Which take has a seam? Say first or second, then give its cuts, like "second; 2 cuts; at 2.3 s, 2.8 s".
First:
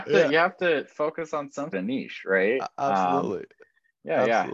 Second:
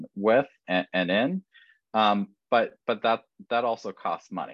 first; 1 cut; at 1.7 s